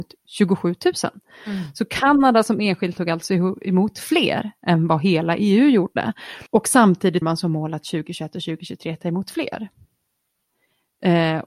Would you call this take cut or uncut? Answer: cut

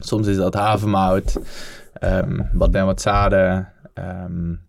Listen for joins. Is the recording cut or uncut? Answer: cut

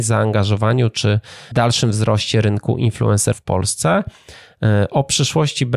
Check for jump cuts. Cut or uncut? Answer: cut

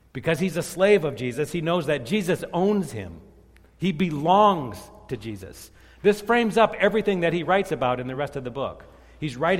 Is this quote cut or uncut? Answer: uncut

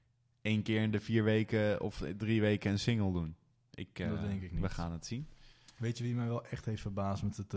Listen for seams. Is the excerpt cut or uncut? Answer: uncut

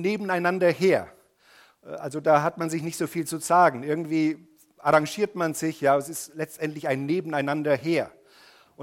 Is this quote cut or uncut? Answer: uncut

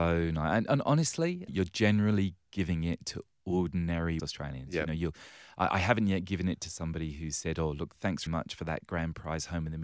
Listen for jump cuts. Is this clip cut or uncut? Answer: cut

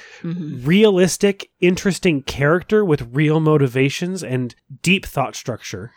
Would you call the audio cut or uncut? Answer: uncut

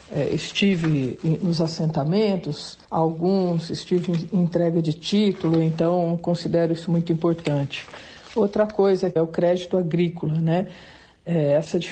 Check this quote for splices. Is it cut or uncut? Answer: cut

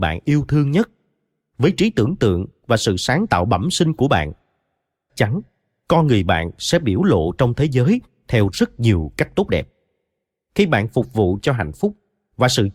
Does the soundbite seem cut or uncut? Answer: cut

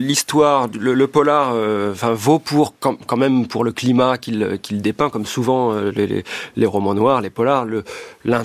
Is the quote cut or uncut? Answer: uncut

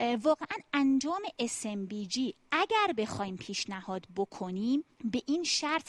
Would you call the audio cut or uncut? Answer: cut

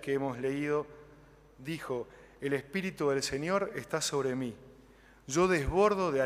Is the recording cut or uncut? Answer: uncut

